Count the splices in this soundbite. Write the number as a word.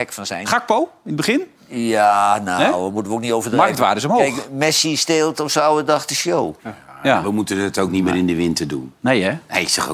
two